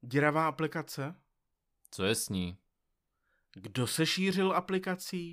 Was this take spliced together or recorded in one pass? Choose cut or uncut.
uncut